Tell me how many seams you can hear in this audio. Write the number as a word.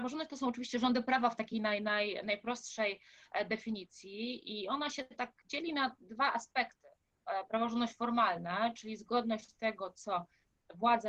zero